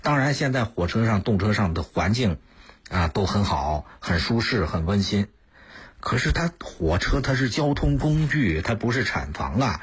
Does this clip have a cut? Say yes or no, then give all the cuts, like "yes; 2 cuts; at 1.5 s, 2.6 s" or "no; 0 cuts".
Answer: no; 0 cuts